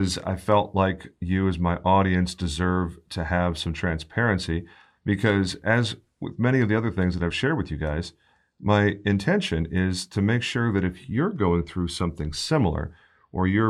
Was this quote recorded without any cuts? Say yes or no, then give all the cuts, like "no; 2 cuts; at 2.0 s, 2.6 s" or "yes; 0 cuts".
yes; 0 cuts